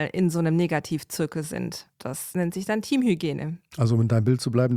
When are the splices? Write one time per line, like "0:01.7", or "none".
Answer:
0:01.9
0:03.7